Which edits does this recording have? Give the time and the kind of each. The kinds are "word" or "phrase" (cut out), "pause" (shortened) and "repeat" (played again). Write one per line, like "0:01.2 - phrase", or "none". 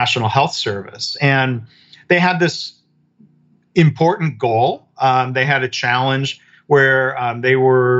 none